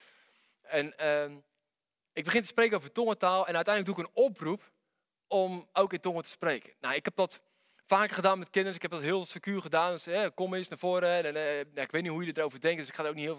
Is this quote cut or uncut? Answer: uncut